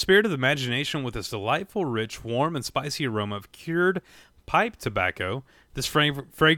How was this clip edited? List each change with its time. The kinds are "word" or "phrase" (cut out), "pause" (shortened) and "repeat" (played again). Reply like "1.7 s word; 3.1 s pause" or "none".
none